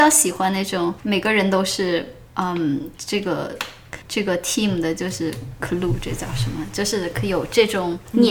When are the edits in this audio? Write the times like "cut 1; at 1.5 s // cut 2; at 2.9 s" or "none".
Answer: cut 1; at 1.0 s // cut 2; at 4.0 s